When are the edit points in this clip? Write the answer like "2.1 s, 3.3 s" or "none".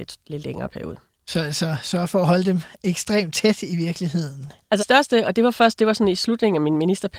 4.8 s